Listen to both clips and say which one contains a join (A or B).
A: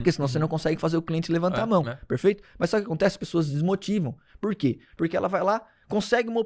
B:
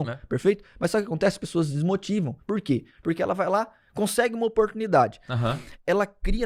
B